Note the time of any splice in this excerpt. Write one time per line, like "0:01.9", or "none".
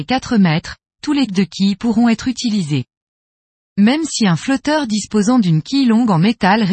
0:01.3